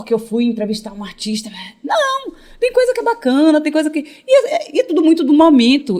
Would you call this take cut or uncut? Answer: uncut